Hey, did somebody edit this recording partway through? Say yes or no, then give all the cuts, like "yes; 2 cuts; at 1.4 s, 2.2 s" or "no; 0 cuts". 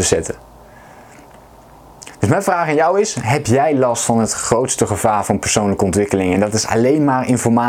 no; 0 cuts